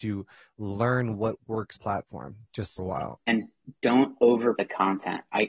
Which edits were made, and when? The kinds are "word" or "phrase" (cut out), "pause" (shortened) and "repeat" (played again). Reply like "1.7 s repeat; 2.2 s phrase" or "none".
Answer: 1.8 s phrase; 2.8 s phrase; 3.2 s word; 4.6 s word